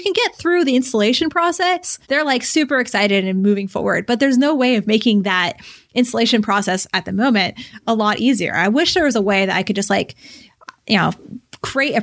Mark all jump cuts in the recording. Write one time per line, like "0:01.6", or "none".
0:02.0